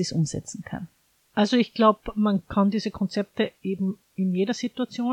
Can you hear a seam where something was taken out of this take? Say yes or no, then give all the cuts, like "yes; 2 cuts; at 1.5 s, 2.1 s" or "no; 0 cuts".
no; 0 cuts